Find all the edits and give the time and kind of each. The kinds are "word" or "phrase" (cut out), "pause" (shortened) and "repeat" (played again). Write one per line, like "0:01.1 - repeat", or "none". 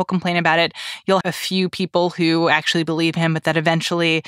0:01.2 - word